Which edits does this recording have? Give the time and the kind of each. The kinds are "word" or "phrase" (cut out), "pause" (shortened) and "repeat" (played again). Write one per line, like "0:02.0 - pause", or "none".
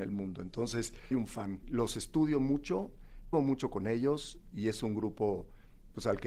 0:01.1 - word
0:01.6 - word
0:03.3 - phrase
0:04.5 - word

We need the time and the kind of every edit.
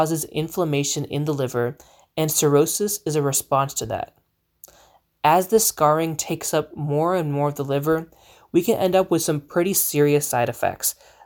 none

